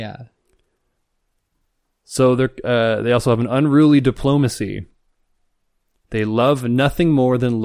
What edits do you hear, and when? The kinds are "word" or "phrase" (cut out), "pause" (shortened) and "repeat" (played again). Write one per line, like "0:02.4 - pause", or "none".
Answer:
none